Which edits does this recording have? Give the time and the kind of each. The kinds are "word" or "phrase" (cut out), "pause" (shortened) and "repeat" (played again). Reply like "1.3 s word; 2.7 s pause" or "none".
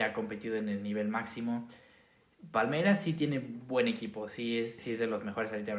4.8 s word